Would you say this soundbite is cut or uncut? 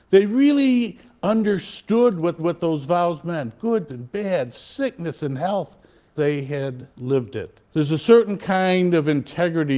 cut